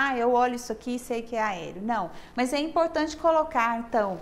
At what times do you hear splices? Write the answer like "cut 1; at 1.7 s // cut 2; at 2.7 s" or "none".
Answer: none